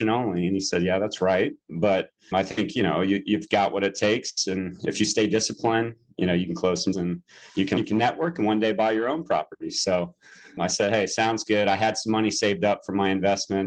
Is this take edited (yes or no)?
yes